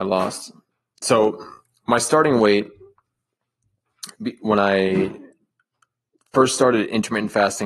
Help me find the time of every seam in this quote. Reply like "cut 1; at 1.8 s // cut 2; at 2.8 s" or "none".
none